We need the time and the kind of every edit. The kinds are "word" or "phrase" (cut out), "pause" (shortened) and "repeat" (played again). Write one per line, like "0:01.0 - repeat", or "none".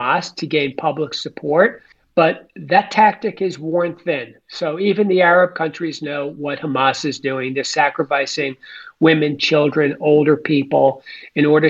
0:01.9 - pause